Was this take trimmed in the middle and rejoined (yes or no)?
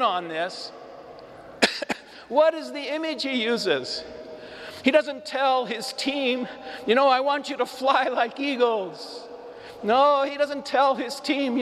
no